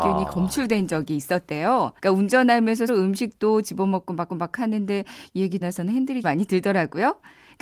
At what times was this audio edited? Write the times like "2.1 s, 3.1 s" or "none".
2.0 s, 2.9 s, 4.3 s, 5.6 s, 6.2 s